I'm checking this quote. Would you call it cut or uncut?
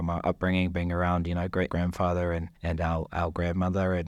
cut